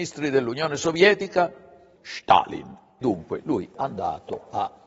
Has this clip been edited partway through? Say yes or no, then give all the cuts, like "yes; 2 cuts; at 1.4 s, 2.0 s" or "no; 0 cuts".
yes; 3 cuts; at 2.0 s, 3.0 s, 3.7 s